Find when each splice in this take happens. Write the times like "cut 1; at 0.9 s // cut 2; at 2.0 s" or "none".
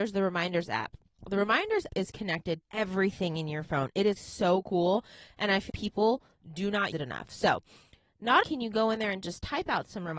cut 1; at 1.9 s // cut 2; at 2.6 s // cut 3; at 4.2 s // cut 4; at 5.7 s // cut 5; at 6.9 s // cut 6; at 8.4 s